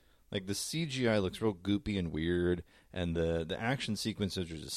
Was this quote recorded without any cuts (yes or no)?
yes